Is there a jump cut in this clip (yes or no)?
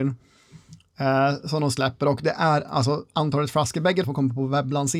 yes